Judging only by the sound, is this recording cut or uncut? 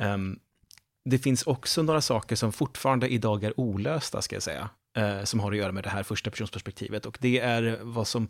uncut